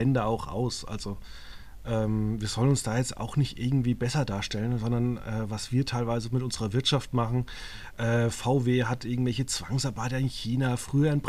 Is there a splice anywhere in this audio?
no; 0 cuts

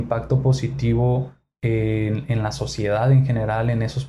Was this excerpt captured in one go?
yes; 0 cuts

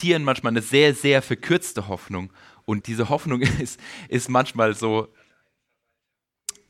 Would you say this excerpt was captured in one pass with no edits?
no; 1 cut; at 2.8 s

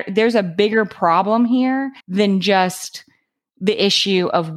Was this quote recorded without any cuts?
no; 1 cut; at 2.0 s

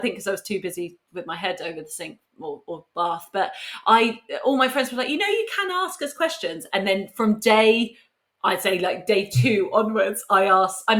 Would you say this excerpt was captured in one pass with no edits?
yes; 0 cuts

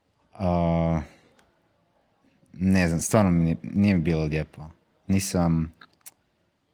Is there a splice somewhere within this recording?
no; 0 cuts

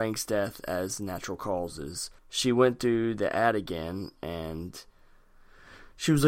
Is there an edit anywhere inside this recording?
yes; 1 cut; at 2.2 s

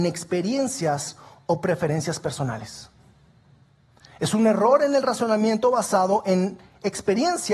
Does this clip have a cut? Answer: no; 0 cuts

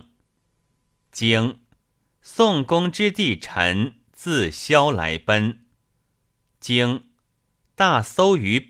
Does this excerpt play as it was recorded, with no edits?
yes; 0 cuts

